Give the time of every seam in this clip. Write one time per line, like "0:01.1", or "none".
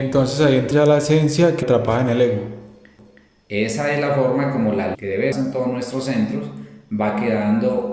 0:01.6
0:04.9
0:05.3

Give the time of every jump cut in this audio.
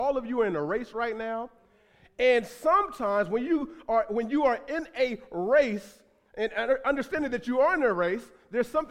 none

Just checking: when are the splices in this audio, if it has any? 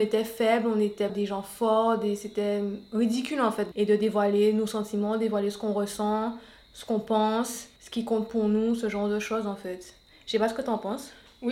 0:01.1
0:03.7
0:07.8

